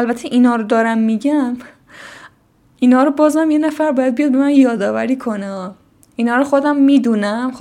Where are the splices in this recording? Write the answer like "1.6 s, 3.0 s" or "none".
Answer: none